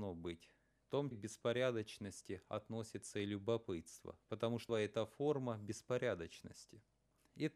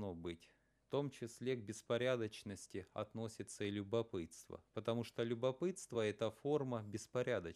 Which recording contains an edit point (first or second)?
first